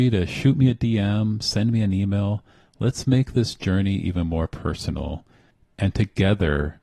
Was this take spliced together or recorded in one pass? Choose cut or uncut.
uncut